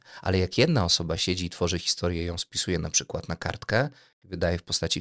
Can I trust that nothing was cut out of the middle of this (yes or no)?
yes